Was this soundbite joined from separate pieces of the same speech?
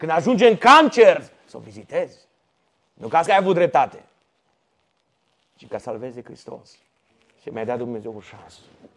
yes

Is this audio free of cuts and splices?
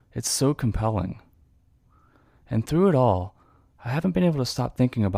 yes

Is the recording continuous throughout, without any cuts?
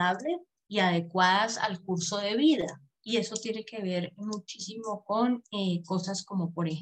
yes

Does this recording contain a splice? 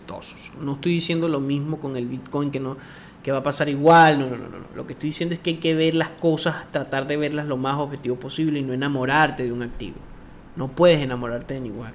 no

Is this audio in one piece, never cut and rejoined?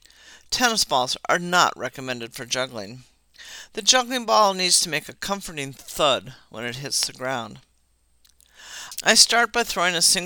yes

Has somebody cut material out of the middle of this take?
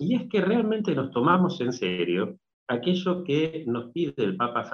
no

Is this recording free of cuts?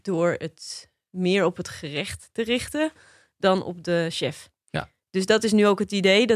yes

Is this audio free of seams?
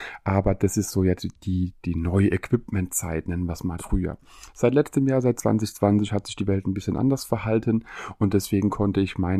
no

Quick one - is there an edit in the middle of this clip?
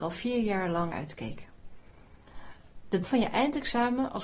yes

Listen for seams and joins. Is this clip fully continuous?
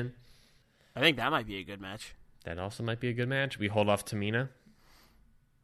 yes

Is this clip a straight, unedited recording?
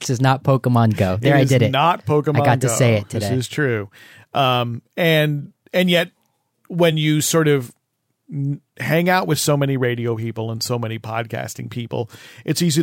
yes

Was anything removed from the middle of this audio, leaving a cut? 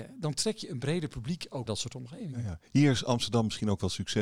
yes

